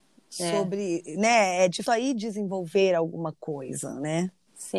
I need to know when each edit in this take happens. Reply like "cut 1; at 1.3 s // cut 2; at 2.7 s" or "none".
cut 1; at 1.8 s